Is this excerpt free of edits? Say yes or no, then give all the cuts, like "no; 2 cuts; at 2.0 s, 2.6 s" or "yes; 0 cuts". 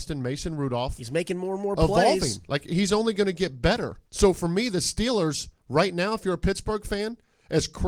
no; 2 cuts; at 4.1 s, 5.6 s